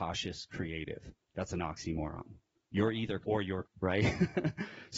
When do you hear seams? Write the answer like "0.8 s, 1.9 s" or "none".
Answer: 3.2 s, 3.6 s